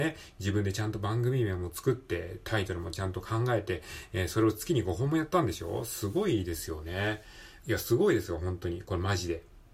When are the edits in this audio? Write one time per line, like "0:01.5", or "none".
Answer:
0:07.6